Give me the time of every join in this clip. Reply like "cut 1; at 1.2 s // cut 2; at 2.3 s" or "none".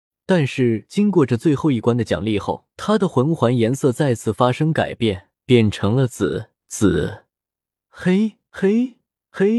cut 1; at 2.7 s // cut 2; at 5.3 s // cut 3; at 6.6 s // cut 4; at 8.5 s

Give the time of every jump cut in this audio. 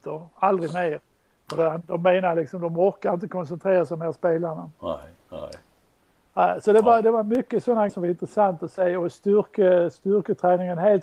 cut 1; at 7.9 s

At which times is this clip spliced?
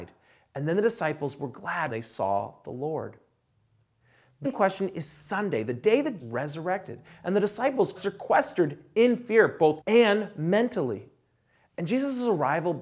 cut 1; at 1.9 s // cut 2; at 4.4 s // cut 3; at 6.2 s // cut 4; at 8.0 s // cut 5; at 9.8 s

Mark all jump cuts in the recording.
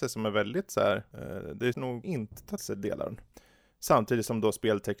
cut 1; at 1.7 s // cut 2; at 2.0 s // cut 3; at 2.6 s // cut 4; at 3.1 s

